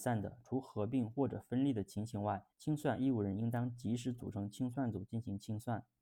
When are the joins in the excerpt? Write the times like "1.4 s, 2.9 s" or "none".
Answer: 2.5 s